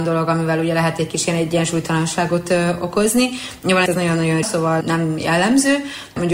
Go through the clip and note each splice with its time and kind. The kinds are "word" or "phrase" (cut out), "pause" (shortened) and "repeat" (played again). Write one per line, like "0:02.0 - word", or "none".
0:03.9 - word
0:04.4 - word
0:04.8 - word